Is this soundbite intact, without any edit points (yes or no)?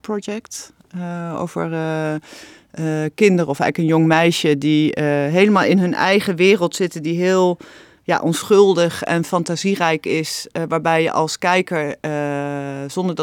yes